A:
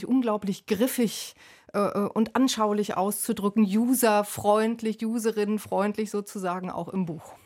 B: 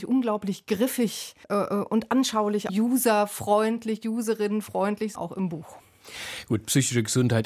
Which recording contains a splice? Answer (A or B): B